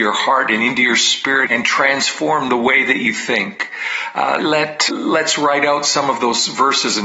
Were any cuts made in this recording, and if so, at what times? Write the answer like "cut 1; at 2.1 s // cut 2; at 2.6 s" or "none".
cut 1; at 1.5 s // cut 2; at 4.4 s // cut 3; at 4.9 s